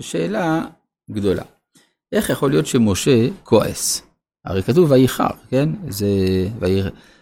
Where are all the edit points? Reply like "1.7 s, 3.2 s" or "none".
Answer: none